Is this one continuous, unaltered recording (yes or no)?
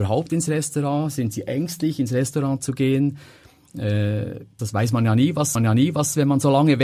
no